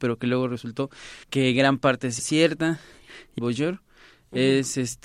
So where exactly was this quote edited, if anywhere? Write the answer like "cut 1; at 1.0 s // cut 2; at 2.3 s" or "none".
cut 1; at 1.2 s // cut 2; at 2.2 s // cut 3; at 3.4 s